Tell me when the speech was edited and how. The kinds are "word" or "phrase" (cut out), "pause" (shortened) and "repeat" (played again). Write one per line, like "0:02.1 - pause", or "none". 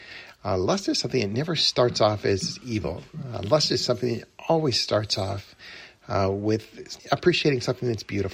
0:07.0 - pause